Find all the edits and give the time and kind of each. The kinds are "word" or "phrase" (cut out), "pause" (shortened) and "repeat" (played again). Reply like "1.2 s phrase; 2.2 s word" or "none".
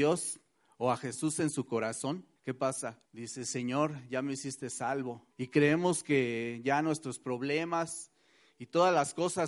2.4 s pause; 3.1 s pause; 5.3 s pause